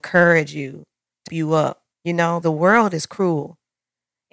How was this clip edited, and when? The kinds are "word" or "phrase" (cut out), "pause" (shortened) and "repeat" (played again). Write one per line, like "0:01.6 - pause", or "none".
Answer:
0:01.3 - word
0:01.9 - pause
0:02.4 - word